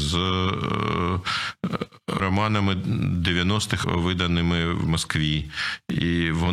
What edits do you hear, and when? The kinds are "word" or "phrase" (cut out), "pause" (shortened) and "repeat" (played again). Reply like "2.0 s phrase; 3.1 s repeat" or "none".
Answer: 2.2 s word; 3.8 s word